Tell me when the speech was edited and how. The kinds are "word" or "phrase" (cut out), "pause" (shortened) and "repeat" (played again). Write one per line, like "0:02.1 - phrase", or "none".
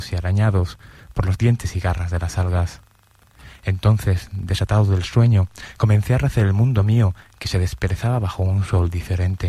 none